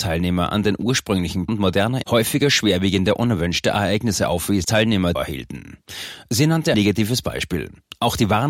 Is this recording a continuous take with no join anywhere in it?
no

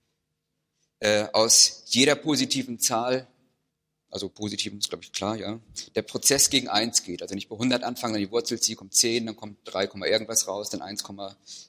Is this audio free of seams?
no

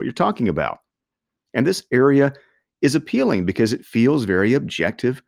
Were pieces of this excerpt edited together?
no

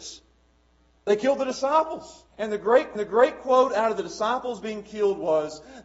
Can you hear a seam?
yes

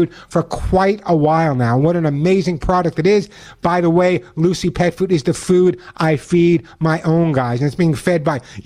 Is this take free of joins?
yes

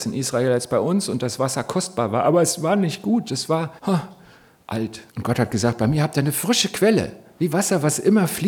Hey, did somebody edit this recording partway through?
yes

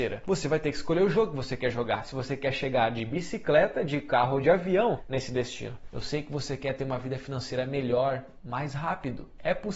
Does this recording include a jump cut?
no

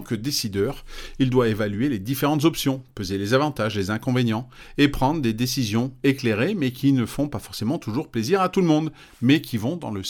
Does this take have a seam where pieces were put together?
no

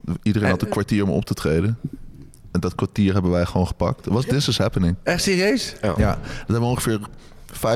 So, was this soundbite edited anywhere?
no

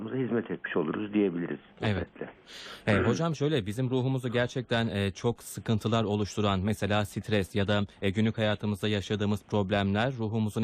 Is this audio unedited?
no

